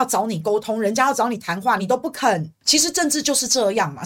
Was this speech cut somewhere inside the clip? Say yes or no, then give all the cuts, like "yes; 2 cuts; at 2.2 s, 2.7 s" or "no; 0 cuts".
yes; 1 cut; at 1.8 s